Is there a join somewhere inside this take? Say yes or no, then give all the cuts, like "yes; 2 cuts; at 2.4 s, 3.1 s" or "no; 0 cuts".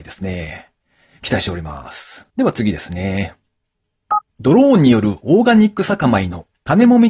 yes; 2 cuts; at 2.3 s, 4.3 s